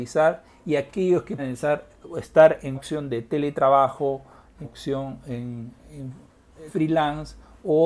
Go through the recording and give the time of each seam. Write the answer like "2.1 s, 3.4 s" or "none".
1.4 s, 2.7 s, 4.6 s, 6.7 s